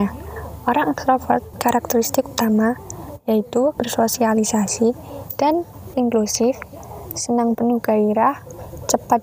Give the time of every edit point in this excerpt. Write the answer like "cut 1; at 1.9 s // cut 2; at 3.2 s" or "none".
cut 1; at 1.5 s // cut 2; at 3.8 s // cut 3; at 5.9 s // cut 4; at 7.5 s